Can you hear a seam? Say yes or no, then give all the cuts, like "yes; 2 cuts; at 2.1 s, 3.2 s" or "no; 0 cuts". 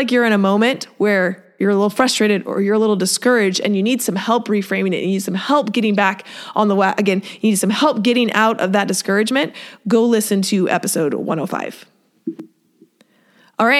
no; 0 cuts